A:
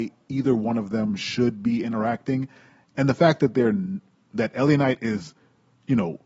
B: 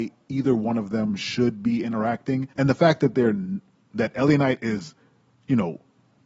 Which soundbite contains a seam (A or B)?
B